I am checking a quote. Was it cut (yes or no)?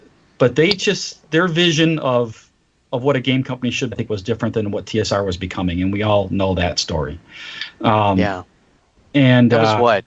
yes